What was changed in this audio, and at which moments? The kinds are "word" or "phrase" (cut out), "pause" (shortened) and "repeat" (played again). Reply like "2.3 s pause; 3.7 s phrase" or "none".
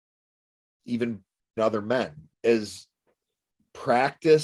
1.6 s word; 2.3 s pause